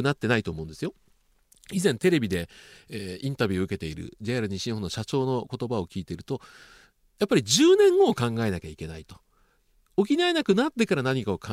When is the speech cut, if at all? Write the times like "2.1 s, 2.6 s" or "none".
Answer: none